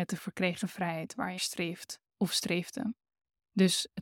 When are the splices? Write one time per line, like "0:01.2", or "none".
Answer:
0:01.4
0:02.1